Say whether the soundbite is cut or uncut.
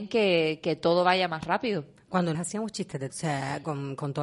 cut